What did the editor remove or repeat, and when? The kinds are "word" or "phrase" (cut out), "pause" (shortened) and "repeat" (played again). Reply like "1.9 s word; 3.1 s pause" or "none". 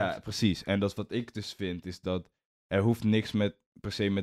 none